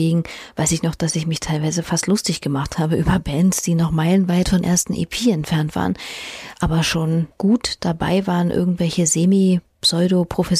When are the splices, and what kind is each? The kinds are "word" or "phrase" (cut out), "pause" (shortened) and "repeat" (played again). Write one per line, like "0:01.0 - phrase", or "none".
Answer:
0:04.6 - word
0:07.3 - pause